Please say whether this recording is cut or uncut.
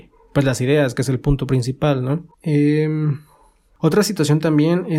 cut